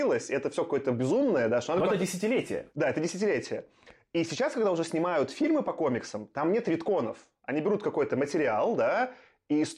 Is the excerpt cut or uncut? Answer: uncut